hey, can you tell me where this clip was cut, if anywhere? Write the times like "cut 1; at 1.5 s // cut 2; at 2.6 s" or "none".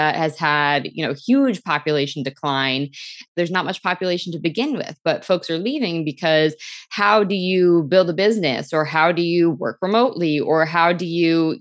none